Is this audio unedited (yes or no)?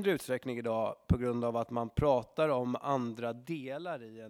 yes